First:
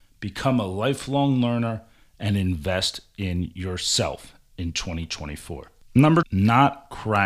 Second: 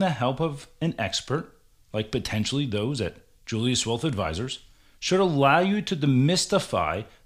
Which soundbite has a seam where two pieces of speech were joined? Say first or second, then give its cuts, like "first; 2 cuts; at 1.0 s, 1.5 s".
first; 1 cut; at 6.2 s